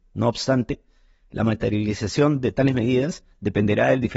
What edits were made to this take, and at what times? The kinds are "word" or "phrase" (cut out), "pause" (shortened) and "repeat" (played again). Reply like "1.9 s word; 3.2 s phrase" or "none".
none